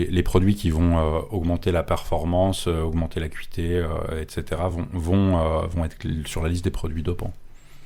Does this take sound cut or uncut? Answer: uncut